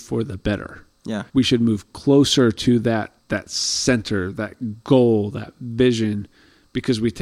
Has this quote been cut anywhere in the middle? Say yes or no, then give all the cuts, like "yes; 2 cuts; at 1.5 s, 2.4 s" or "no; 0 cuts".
yes; 2 cuts; at 1.3 s, 3.2 s